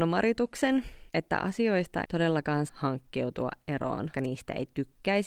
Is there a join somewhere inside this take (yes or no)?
yes